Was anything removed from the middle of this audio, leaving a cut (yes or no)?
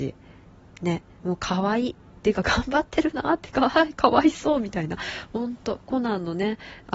yes